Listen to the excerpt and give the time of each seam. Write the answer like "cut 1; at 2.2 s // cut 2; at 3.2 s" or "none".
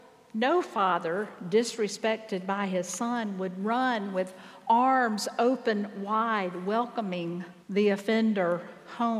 cut 1; at 7.6 s